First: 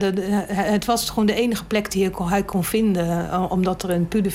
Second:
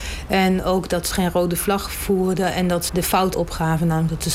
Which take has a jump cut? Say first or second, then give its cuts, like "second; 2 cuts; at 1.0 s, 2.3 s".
second; 3 cuts; at 1.1 s, 2.9 s, 3.3 s